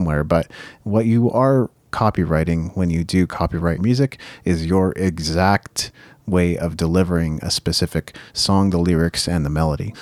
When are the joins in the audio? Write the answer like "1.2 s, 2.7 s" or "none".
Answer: 3.8 s